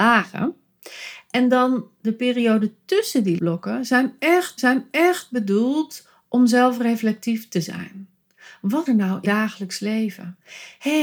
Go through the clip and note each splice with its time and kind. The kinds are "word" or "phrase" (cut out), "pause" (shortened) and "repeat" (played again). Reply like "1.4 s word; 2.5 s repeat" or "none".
3.4 s word; 4.6 s repeat; 8.9 s word; 9.2 s word